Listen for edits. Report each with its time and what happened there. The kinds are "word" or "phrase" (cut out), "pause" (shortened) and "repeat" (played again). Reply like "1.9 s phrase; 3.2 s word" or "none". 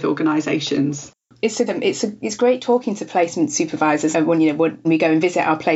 1.7 s word; 4.1 s word; 4.8 s word